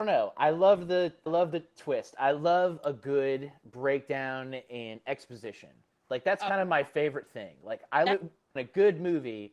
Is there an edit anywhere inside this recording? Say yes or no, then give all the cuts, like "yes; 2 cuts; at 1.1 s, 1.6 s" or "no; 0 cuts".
yes; 3 cuts; at 1.3 s, 8.1 s, 8.6 s